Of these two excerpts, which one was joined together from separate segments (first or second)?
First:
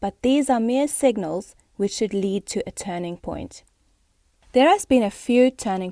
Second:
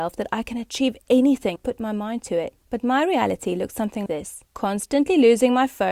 second